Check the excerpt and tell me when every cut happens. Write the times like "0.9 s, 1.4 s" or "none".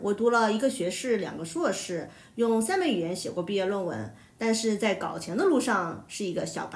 none